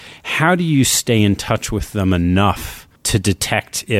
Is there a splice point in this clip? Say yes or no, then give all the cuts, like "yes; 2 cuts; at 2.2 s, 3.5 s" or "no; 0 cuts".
yes; 1 cut; at 3.0 s